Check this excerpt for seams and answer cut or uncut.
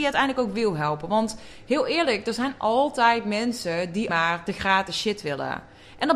cut